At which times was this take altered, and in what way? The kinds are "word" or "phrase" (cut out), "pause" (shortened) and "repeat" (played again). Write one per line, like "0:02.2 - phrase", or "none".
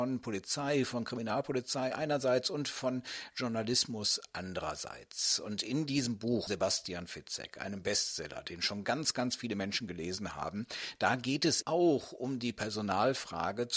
0:06.5 - word
0:11.6 - word